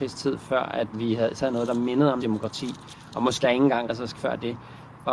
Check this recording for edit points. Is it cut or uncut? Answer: cut